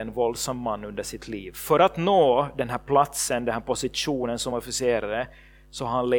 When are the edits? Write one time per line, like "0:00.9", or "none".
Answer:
none